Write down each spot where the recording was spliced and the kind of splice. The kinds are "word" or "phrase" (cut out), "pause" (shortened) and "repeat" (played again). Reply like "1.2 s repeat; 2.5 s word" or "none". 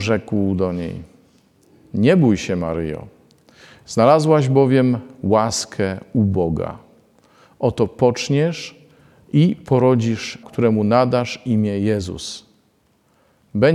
10.4 s word